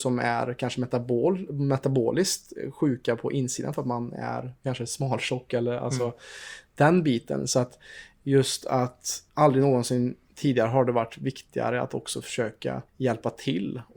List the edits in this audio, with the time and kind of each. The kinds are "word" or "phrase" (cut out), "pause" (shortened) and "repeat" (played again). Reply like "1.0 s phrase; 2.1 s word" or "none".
9.3 s pause; 12.9 s pause